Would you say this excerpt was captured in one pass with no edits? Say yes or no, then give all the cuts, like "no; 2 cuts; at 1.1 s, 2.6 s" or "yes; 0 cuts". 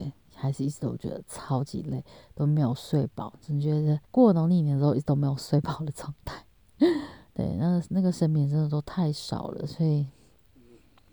no; 1 cut; at 4.0 s